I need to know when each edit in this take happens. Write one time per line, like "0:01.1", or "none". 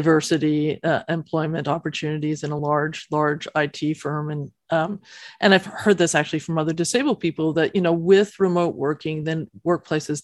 none